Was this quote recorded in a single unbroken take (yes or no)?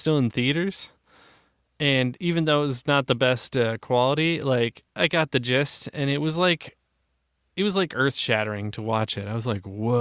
yes